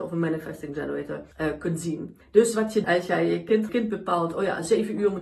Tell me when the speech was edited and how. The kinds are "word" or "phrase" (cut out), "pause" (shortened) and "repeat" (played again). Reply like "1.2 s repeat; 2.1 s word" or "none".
1.3 s pause; 2.2 s pause; 2.8 s word; 3.7 s phrase